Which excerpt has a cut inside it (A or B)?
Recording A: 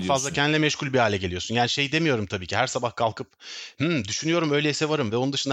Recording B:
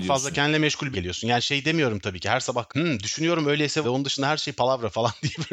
B